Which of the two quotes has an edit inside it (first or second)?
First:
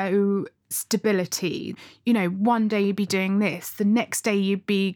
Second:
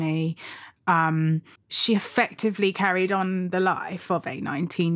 second